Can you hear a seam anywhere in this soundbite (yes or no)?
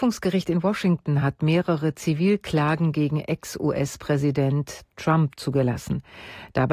no